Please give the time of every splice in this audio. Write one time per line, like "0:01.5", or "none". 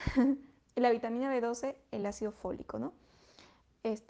none